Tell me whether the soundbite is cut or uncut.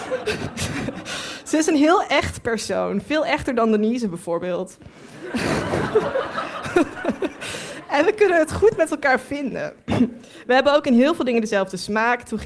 uncut